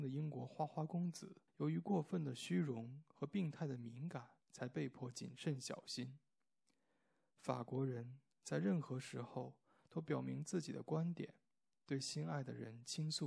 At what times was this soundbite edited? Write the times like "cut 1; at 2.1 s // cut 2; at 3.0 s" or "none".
cut 1; at 1.5 s // cut 2; at 4.4 s

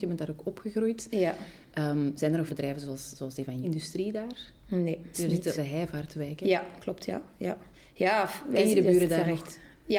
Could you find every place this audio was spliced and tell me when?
cut 1; at 2.5 s // cut 2; at 3.6 s // cut 3; at 5.1 s // cut 4; at 5.6 s // cut 5; at 7.7 s

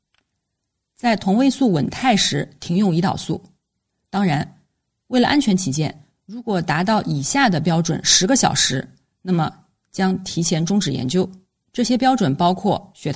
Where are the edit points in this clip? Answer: none

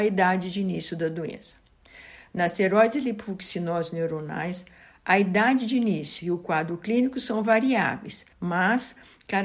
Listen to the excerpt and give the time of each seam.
cut 1; at 8.3 s

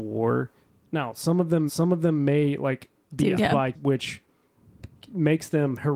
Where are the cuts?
cut 1; at 1.7 s // cut 2; at 3.4 s // cut 3; at 3.7 s

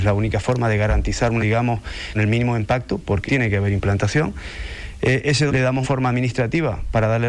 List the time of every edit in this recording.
cut 1; at 1.4 s // cut 2; at 2.1 s // cut 3; at 3.3 s // cut 4; at 5.5 s // cut 5; at 5.8 s

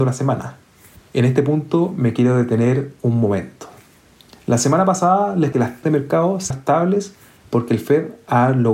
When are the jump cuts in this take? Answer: cut 1; at 5.5 s // cut 2; at 5.8 s // cut 3; at 6.5 s

